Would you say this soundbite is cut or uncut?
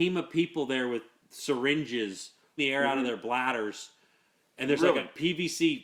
cut